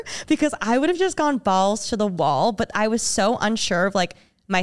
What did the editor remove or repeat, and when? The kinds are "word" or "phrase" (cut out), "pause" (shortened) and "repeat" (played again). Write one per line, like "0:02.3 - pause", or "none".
none